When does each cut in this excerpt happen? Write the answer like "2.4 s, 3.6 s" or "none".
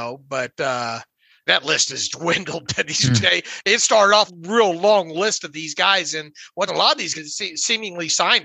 1.5 s, 2.1 s, 3.2 s, 4.3 s, 6.7 s, 7.1 s